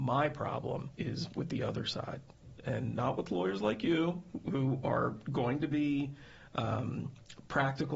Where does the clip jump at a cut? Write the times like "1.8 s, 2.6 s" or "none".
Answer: 1.0 s